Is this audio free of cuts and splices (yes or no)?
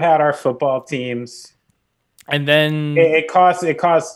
yes